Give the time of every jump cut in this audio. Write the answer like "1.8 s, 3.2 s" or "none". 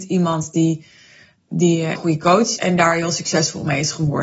2.0 s, 2.6 s